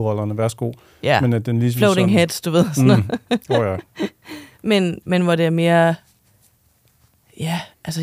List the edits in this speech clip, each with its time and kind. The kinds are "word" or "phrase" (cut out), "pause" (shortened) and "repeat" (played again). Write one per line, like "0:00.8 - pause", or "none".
0:04.5 - pause